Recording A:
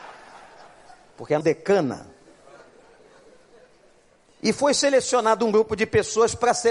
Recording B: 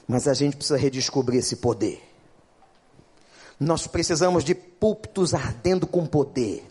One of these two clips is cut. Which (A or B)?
A